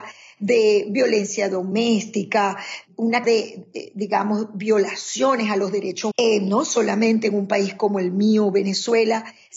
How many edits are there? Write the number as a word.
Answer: two